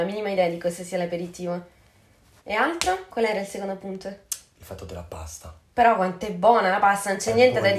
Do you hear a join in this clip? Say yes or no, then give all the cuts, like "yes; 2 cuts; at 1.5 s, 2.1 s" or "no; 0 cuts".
no; 0 cuts